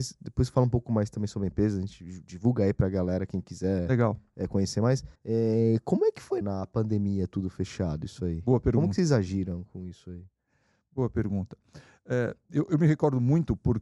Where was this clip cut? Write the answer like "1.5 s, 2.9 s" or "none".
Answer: 5.2 s, 6.4 s